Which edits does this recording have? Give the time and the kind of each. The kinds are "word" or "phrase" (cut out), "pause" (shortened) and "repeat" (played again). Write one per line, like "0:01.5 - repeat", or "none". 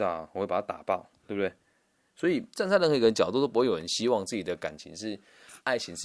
none